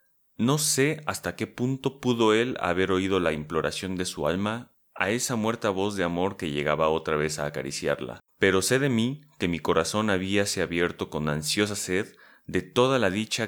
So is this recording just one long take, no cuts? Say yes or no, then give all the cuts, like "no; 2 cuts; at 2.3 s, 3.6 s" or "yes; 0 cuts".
no; 1 cut; at 8.3 s